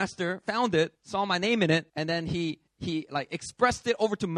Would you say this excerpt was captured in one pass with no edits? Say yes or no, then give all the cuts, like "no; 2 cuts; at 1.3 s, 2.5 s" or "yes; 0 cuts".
no; 3 cuts; at 0.9 s, 1.9 s, 2.7 s